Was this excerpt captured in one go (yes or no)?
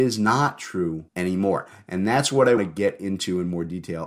no